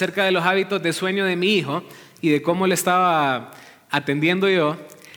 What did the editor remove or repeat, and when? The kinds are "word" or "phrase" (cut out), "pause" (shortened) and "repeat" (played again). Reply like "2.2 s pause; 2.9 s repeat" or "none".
none